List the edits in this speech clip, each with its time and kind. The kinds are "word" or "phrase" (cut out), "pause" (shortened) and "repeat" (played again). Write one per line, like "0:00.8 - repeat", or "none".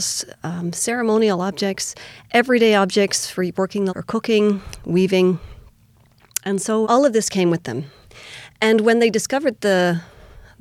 0:03.9 - word
0:06.8 - word